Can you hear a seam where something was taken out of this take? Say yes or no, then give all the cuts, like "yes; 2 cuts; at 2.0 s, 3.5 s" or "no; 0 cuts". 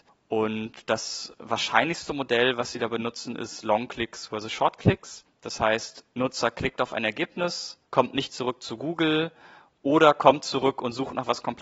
yes; 1 cut; at 7.8 s